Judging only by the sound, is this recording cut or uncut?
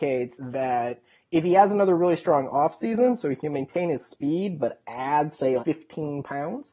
cut